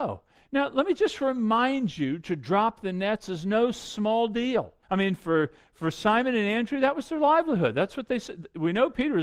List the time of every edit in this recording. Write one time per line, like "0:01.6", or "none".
0:04.8